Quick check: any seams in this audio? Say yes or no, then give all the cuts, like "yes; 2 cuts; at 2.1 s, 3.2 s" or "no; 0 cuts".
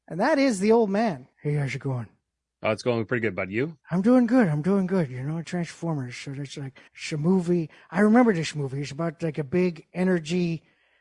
yes; 4 cuts; at 1.3 s, 3.8 s, 5.4 s, 6.9 s